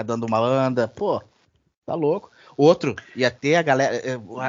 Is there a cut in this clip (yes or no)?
no